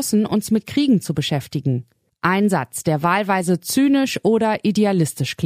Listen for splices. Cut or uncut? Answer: uncut